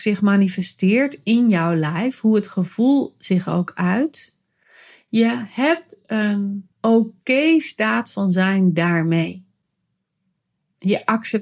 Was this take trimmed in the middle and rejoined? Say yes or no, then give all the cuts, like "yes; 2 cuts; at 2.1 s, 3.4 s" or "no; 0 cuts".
yes; 1 cut; at 6.7 s